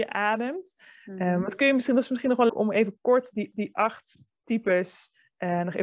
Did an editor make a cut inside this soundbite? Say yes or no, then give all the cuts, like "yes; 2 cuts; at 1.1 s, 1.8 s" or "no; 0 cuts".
yes; 2 cuts; at 2.5 s, 3.5 s